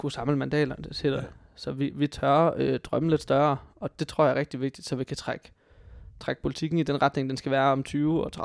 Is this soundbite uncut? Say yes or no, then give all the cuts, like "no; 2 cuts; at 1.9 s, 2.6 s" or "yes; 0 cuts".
yes; 0 cuts